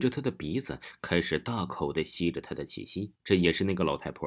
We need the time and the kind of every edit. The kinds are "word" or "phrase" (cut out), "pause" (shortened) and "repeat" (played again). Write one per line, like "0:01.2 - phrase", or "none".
0:03.2 - pause